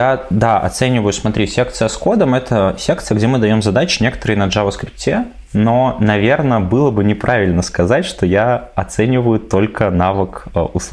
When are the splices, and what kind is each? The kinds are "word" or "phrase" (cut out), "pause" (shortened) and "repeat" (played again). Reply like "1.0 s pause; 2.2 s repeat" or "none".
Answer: none